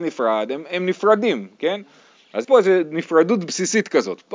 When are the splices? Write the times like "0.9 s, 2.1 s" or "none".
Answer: 2.4 s